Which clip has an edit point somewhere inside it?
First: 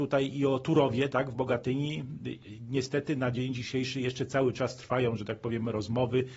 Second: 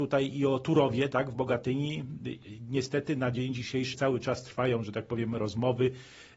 second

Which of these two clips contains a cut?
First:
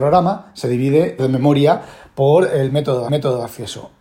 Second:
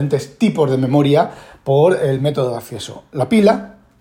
first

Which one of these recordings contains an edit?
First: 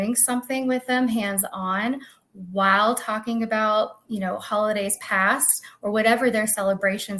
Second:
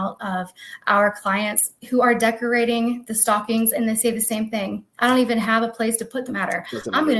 second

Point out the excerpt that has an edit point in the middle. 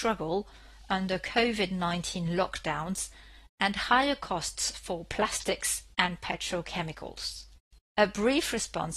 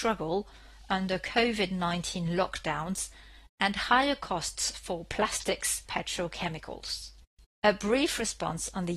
second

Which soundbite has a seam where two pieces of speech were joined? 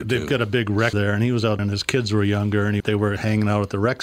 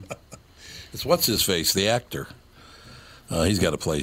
first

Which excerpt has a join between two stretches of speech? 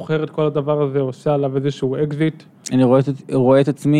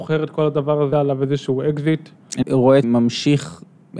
second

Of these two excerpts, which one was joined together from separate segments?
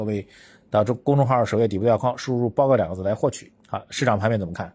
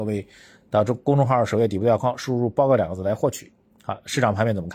first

